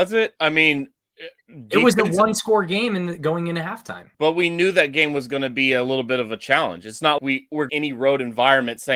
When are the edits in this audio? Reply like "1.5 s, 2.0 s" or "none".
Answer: 4.1 s, 7.2 s, 7.7 s